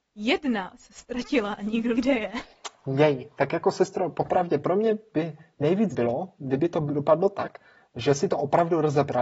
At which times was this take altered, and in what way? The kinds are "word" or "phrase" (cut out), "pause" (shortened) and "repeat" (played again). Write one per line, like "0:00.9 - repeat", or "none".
0:01.9 - word
0:05.9 - word